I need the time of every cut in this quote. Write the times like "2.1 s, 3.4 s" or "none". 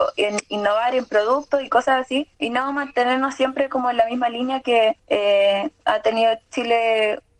2.3 s, 5.0 s